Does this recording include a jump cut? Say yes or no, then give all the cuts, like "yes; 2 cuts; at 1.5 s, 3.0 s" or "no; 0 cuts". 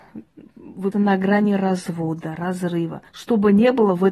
yes; 2 cuts; at 0.9 s, 3.1 s